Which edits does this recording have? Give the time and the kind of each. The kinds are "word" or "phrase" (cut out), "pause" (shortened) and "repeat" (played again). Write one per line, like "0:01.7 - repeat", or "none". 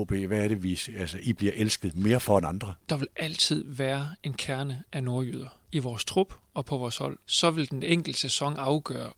0:02.8 - pause
0:05.6 - pause
0:07.2 - pause